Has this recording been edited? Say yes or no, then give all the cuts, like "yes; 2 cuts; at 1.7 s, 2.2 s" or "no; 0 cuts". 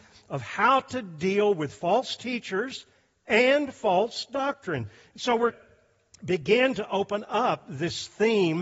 yes; 1 cut; at 5.5 s